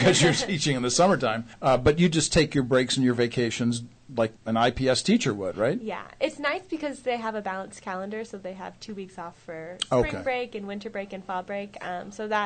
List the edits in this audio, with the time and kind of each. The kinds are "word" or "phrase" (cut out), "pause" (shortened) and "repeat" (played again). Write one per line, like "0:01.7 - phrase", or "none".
0:01.5 - pause
0:04.4 - pause